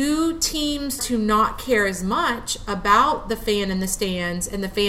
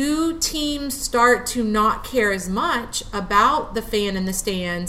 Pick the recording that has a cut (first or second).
first